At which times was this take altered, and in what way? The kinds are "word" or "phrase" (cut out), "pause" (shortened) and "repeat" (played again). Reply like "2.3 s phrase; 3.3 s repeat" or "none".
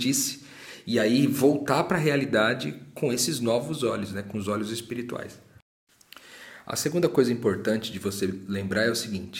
none

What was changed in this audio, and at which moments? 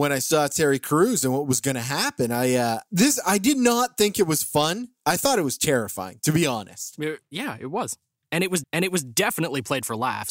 8.6 s repeat

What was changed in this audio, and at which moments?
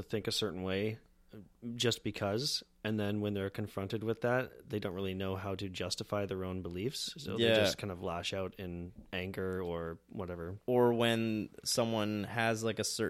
9.1 s pause

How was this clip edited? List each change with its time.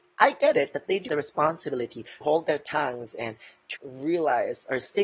1.1 s word; 2.2 s word; 3.8 s word

